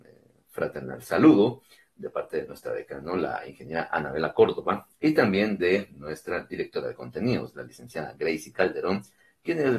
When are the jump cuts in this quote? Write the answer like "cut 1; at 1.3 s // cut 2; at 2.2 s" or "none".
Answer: none